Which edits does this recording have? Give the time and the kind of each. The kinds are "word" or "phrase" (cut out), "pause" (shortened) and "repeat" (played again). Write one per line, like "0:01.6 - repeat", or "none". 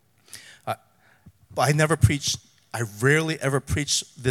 none